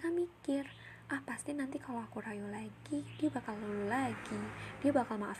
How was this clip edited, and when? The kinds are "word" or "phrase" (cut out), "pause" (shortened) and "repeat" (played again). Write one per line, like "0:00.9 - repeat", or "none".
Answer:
none